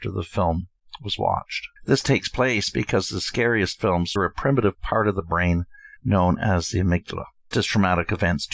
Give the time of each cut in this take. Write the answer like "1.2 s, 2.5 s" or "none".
1.8 s, 4.2 s, 6.0 s, 7.5 s